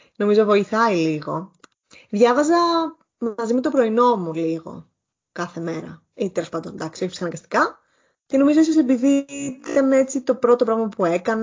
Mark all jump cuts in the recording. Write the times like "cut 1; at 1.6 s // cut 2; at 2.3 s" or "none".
none